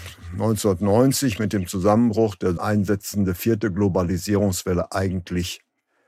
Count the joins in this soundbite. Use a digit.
1